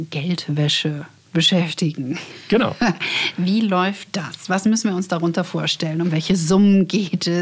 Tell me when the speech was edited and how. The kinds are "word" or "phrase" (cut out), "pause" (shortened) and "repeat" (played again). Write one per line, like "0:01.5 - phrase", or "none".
none